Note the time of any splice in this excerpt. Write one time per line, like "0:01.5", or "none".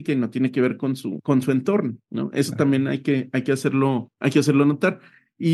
none